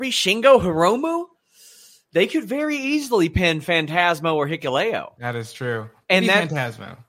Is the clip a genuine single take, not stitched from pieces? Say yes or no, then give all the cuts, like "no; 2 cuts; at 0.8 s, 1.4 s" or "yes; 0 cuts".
yes; 0 cuts